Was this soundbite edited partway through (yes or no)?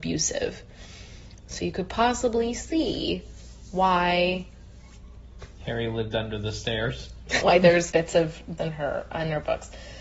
yes